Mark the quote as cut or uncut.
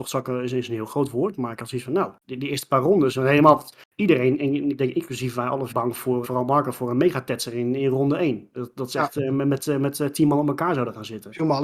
cut